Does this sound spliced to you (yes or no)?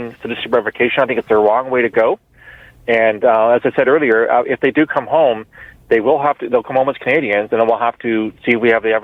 no